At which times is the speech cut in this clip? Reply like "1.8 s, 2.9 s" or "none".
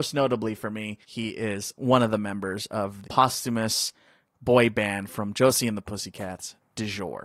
1.0 s, 3.0 s